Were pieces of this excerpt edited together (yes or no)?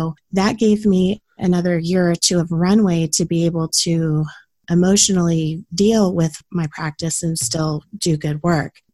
no